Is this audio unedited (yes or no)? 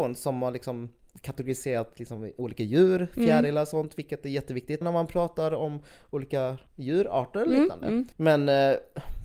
no